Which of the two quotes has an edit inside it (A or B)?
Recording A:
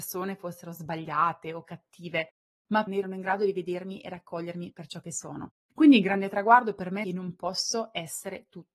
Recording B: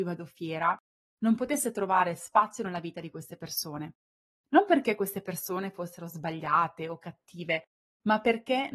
A